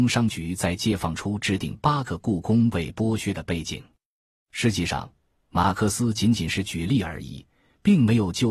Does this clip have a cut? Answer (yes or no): no